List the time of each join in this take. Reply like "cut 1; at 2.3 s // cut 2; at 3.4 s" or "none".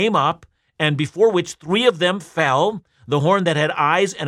none